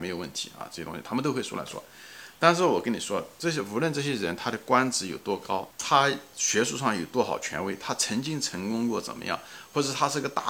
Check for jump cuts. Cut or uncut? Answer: cut